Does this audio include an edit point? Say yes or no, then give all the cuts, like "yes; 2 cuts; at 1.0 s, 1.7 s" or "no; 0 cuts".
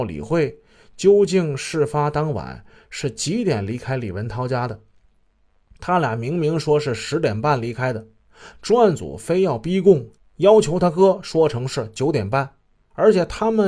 no; 0 cuts